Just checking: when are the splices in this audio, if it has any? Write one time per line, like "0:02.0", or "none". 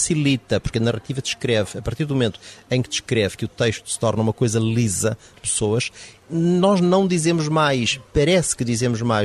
0:05.3